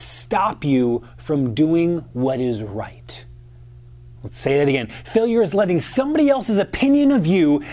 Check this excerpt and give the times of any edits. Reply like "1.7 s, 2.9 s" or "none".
4.2 s